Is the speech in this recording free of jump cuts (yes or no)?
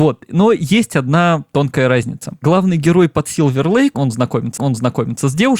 no